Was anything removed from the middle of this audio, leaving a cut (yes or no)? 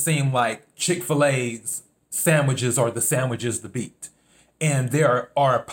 no